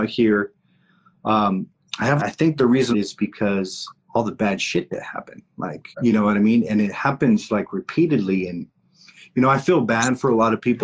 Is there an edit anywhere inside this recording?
yes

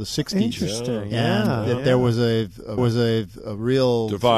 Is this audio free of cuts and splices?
no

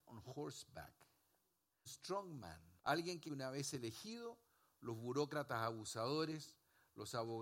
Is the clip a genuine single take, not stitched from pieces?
no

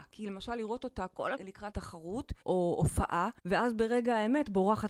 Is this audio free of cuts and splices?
no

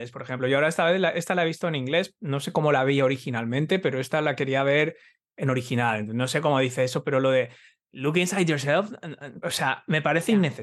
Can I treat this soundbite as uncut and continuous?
no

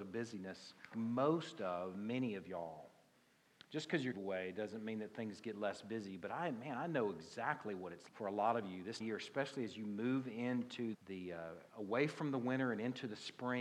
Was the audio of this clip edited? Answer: yes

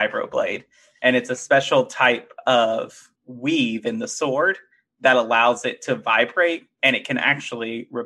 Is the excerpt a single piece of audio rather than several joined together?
no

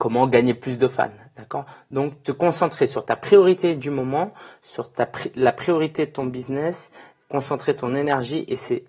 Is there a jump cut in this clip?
no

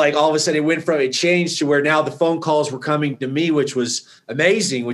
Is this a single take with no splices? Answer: yes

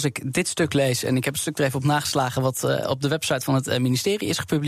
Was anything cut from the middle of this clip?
no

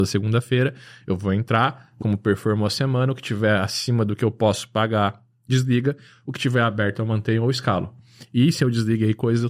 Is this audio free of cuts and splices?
no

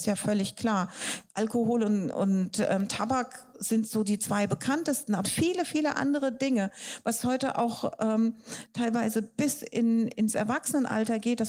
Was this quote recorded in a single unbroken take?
no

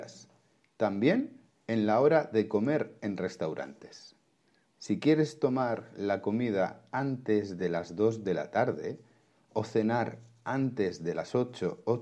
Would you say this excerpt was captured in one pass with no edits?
yes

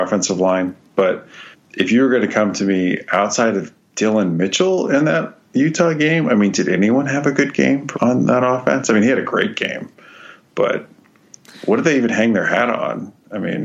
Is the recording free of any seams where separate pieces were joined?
no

